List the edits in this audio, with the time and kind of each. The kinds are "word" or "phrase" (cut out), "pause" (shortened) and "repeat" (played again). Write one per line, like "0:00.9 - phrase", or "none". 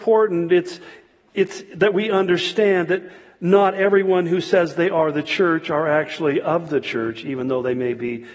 none